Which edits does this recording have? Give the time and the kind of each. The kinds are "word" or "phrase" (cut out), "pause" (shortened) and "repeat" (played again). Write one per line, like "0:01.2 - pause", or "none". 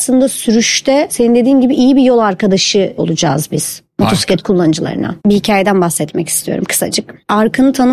0:05.2 - pause

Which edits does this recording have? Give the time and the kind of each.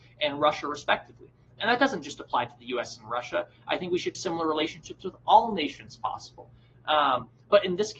0:04.1 - word

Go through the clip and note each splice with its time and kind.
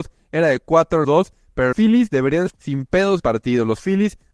0:01.0 - word
0:01.7 - word
0:02.5 - word
0:03.2 - word

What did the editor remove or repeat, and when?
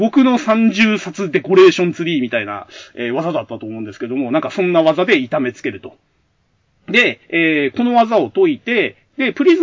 0:07.2 - pause

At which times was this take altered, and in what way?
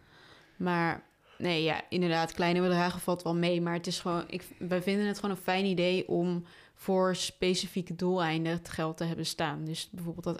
none

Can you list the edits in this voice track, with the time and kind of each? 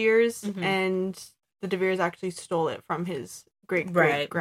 none

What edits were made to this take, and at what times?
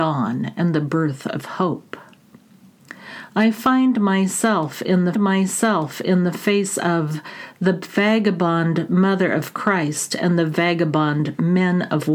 0:05.1 - repeat

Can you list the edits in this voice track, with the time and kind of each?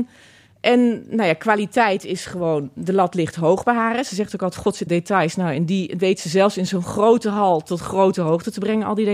0:04.9 - phrase

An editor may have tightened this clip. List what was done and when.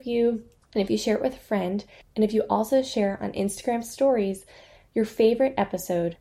none

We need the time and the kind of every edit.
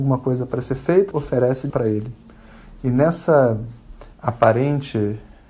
0:01.1 - word
0:01.7 - word
0:04.1 - pause

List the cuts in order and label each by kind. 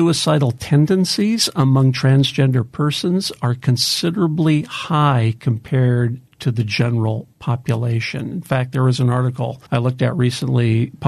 0:09.7 - pause

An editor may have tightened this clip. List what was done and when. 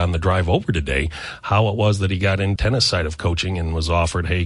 0:02.6 - word

